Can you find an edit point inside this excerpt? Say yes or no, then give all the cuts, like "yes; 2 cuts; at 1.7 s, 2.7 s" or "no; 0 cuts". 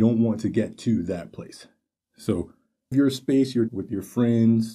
yes; 2 cuts; at 2.9 s, 3.7 s